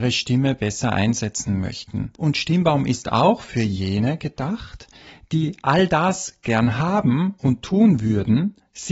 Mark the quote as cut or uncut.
cut